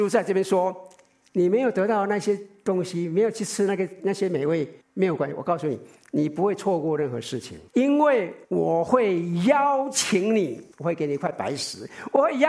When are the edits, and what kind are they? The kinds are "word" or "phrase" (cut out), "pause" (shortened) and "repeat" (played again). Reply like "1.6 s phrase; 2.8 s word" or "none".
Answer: 4.8 s pause; 7.7 s pause; 8.4 s pause; 10.7 s pause

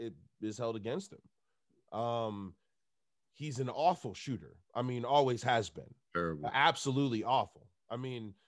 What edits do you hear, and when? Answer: 4.6 s pause

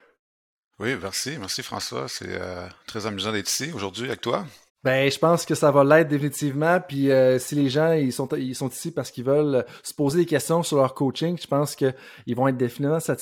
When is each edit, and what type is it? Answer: 4.7 s pause

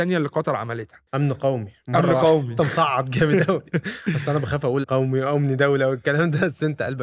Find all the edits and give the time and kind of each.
1.1 s pause; 4.8 s word

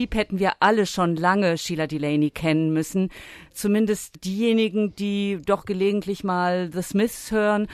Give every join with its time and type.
4.1 s word

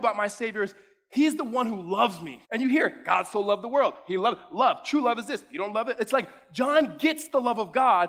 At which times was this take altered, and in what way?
2.4 s pause

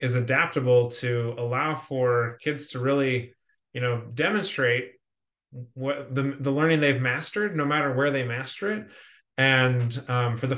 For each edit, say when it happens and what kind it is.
none

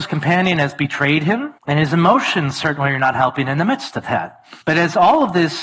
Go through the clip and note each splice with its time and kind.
1.6 s pause; 4.6 s pause

